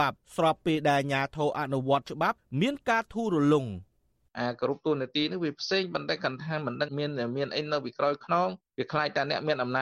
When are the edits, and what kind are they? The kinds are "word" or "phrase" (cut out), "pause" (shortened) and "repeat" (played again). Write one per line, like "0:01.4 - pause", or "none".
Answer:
none